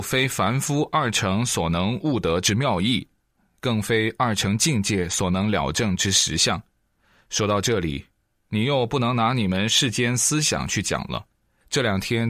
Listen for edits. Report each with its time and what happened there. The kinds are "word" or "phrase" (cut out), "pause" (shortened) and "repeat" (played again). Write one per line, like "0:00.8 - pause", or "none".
none

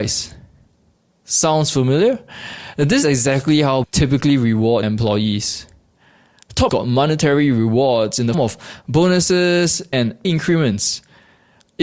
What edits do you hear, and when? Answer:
0:03.0 - word
0:03.8 - word
0:04.8 - word
0:06.7 - word
0:08.3 - word
0:09.9 - word
0:10.2 - word

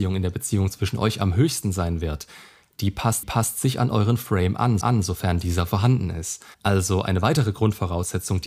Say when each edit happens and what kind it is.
0:03.2 - repeat
0:04.8 - repeat
0:06.5 - pause

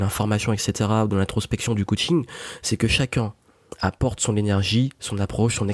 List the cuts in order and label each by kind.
none

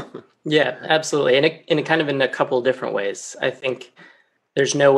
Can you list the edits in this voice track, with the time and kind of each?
none

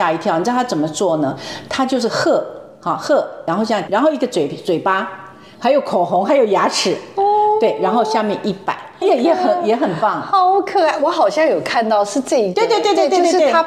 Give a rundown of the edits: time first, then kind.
0:03.9 - word
0:09.0 - word

